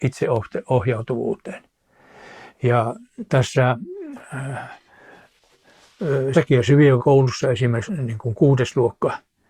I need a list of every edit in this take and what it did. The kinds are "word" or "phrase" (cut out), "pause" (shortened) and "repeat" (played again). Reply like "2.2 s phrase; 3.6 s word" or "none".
6.3 s word; 7.0 s word; 7.9 s word